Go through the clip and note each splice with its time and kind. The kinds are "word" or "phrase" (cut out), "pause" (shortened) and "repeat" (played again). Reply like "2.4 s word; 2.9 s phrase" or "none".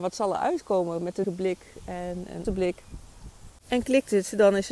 1.2 s word; 2.4 s word